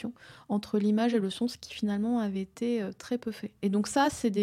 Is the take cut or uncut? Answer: uncut